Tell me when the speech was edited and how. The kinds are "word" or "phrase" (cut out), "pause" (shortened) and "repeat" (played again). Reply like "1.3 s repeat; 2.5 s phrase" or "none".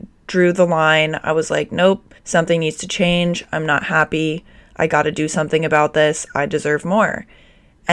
2.2 s pause